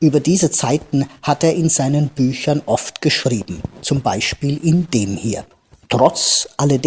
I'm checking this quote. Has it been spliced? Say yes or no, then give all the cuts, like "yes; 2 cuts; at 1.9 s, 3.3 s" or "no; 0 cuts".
no; 0 cuts